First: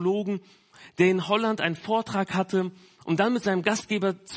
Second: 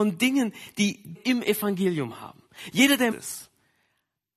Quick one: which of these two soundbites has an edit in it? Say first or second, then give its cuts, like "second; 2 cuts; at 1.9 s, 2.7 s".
second; 2 cuts; at 1.1 s, 3.1 s